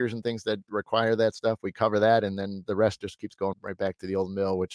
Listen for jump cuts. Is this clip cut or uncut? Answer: cut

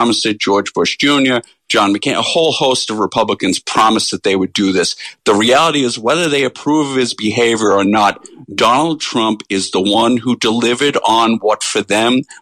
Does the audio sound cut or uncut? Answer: uncut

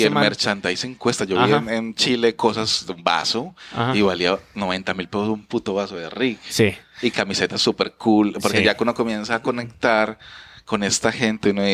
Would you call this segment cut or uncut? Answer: uncut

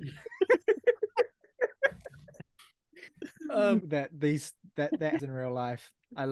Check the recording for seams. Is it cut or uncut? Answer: cut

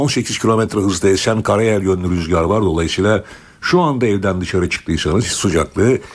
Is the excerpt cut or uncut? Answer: uncut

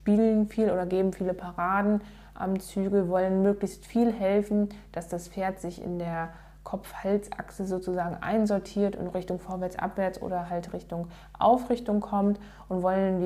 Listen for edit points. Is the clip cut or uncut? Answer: uncut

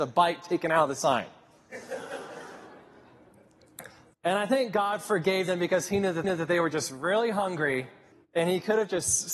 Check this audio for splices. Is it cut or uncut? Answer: cut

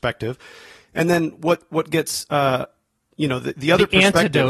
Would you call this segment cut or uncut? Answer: uncut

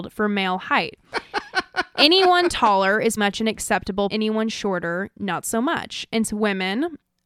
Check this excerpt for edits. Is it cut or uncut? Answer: cut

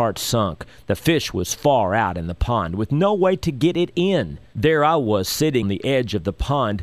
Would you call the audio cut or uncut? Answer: cut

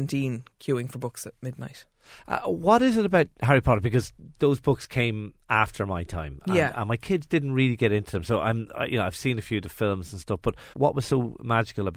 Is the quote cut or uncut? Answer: cut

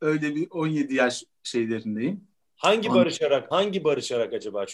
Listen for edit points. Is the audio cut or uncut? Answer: cut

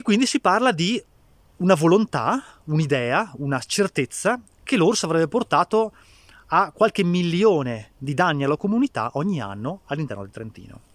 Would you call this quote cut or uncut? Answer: uncut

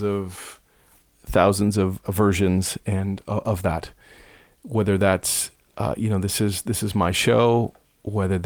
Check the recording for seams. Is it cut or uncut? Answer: uncut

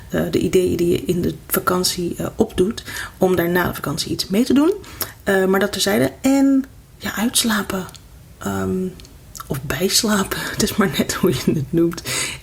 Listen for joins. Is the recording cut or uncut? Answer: uncut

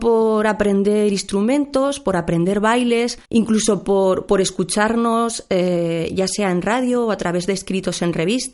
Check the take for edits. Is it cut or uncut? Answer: cut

